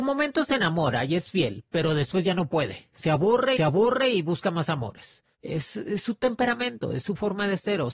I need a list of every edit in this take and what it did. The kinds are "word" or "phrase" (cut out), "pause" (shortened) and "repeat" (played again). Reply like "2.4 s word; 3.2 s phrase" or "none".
3.6 s repeat